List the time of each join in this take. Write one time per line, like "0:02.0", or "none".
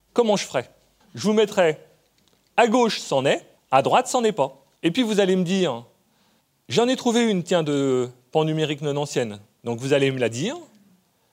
0:03.6
0:04.8